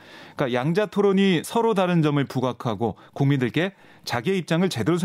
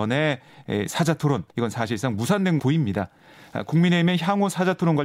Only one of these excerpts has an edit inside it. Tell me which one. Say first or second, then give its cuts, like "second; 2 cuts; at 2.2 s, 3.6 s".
second; 2 cuts; at 1.5 s, 2.6 s